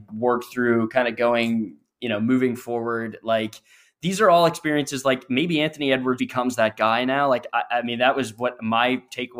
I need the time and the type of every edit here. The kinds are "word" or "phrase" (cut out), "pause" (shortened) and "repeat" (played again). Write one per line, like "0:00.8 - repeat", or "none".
0:06.2 - word